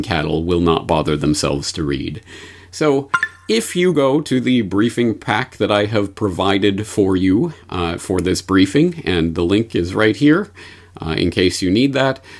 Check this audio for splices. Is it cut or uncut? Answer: uncut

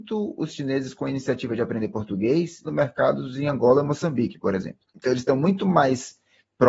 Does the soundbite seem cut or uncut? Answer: cut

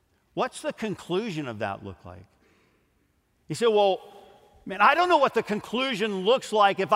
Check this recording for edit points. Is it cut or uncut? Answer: uncut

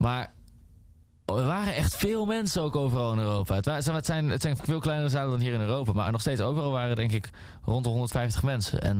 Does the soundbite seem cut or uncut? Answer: uncut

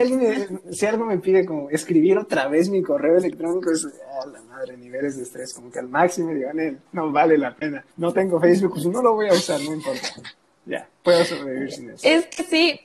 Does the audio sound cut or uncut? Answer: cut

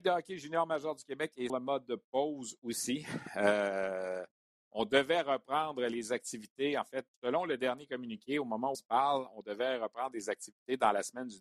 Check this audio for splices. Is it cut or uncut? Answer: cut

